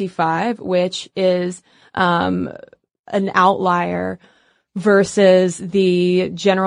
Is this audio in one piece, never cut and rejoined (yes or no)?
yes